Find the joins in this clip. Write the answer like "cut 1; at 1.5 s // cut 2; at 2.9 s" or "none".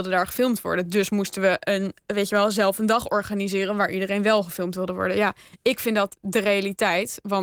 none